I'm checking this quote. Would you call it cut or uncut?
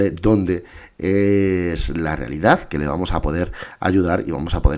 uncut